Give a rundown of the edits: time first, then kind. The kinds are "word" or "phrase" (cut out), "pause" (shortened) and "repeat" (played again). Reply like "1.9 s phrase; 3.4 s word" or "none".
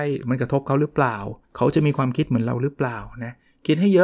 1.4 s pause